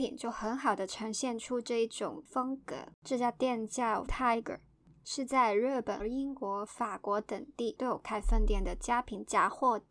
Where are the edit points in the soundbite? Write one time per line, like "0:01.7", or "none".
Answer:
0:02.9
0:04.1
0:06.0